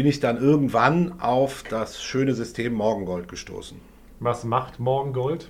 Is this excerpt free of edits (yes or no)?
yes